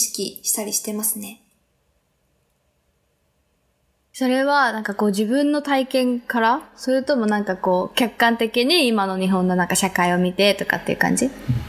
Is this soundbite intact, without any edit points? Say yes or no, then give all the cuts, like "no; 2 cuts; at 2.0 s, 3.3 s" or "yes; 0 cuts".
yes; 0 cuts